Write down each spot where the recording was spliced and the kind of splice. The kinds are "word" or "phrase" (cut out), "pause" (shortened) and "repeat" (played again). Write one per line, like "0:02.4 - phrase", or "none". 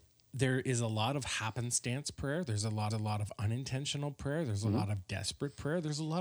0:02.9 - repeat

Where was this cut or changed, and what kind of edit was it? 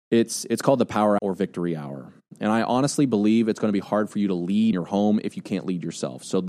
0:01.2 - word
0:04.7 - word

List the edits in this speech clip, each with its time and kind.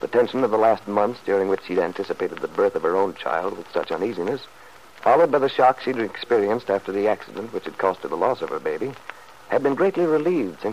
none

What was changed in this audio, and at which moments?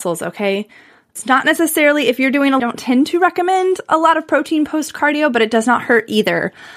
0:02.6 - phrase

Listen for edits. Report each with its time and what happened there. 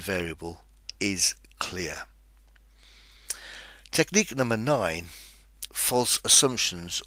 0:05.7 - word

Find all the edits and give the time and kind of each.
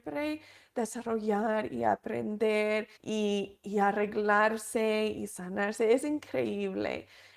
0:03.0 - pause

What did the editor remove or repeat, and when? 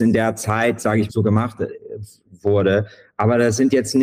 0:01.1 - word

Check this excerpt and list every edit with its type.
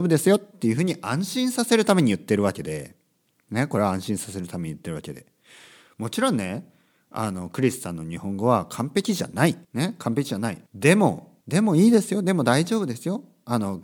0:09.6 - pause
0:10.7 - pause
0:11.4 - pause

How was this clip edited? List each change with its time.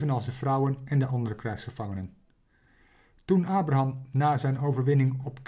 none

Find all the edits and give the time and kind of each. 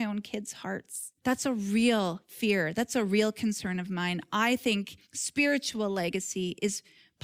0:01.2 - pause
0:05.0 - pause

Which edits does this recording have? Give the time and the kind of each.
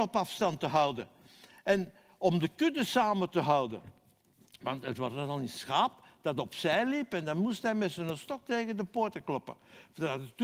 none

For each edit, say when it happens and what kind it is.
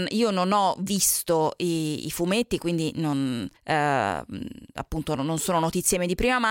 0:03.6 - pause

